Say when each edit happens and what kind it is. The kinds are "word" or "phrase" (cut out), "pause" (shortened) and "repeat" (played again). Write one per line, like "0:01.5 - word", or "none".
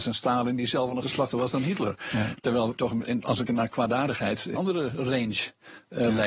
0:01.0 - word
0:02.8 - word
0:03.5 - word
0:04.5 - word